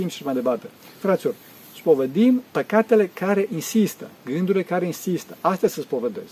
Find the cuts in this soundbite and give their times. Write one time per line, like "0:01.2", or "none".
0:00.9
0:02.5
0:04.2